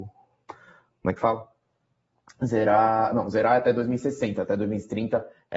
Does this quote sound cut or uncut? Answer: uncut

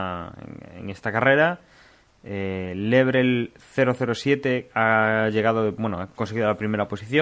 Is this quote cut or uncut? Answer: uncut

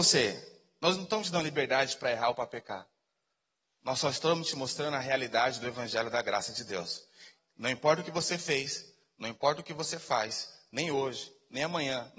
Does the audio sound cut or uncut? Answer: uncut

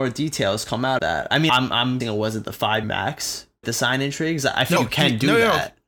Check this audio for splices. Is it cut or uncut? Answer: cut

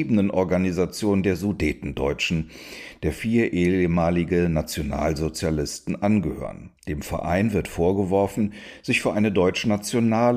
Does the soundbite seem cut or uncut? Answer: cut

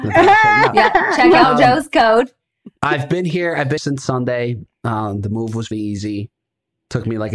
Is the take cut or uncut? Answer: cut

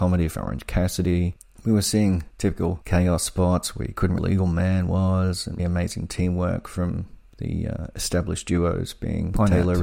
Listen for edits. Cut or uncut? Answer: cut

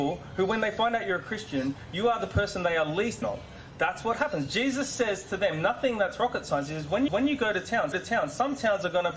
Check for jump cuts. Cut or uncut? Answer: cut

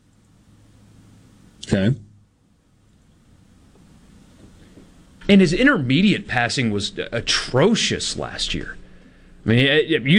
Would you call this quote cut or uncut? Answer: uncut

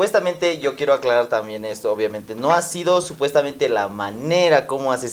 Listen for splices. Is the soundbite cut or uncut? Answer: uncut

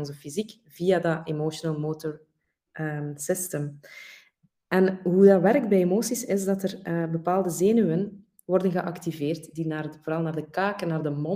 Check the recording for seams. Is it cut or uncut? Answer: uncut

